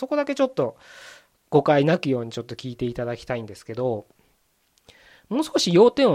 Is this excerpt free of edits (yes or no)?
yes